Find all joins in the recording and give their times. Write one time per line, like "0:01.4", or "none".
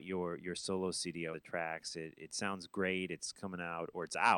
0:01.3

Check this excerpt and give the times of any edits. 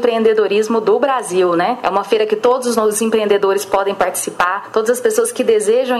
none

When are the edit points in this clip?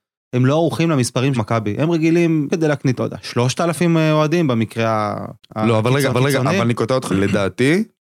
0:01.3
0:02.5
0:03.0
0:05.4
0:06.1
0:07.1

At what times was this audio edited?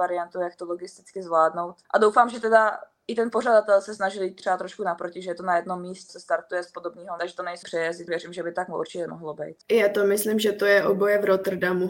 0:01.8
0:06.1
0:07.2
0:07.6
0:08.1
0:09.6

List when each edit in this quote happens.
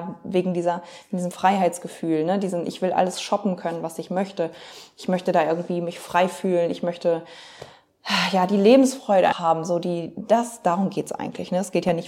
0:09.3

